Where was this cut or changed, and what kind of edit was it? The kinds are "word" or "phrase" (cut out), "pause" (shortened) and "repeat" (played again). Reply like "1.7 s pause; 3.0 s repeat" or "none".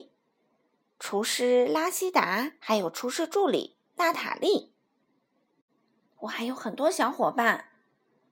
2.6 s pause